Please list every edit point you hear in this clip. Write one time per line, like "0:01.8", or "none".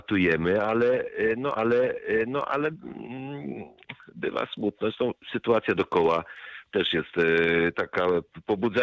0:01.6
0:05.2